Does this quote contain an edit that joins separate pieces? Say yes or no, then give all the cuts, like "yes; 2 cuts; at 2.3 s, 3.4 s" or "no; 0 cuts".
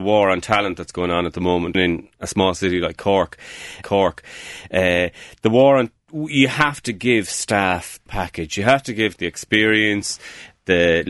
yes; 4 cuts; at 1.7 s, 3.8 s, 8.1 s, 9.2 s